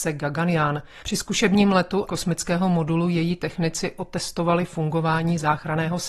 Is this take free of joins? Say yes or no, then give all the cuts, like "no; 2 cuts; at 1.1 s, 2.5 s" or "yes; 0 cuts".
no; 1 cut; at 2.1 s